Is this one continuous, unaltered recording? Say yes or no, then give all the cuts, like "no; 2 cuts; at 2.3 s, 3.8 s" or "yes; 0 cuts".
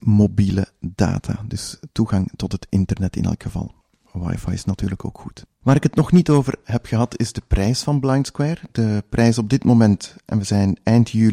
no; 2 cuts; at 3.8 s, 5.5 s